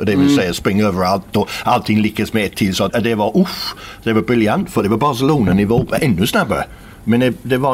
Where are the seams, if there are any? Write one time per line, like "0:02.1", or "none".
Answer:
0:02.9